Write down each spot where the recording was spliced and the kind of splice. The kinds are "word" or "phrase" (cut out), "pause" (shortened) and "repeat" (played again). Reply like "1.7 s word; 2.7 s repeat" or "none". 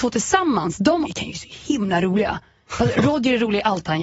1.0 s word